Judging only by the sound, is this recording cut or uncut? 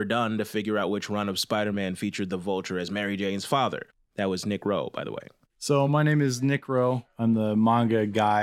uncut